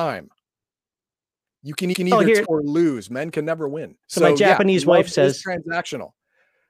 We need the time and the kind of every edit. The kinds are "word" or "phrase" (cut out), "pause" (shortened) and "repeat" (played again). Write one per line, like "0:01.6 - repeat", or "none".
0:01.9 - repeat
0:02.4 - word
0:04.0 - pause